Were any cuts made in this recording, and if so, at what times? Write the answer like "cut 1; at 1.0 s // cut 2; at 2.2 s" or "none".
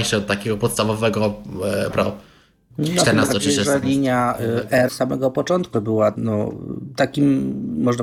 cut 1; at 1.9 s // cut 2; at 3.8 s // cut 3; at 4.9 s // cut 4; at 5.7 s // cut 5; at 6.1 s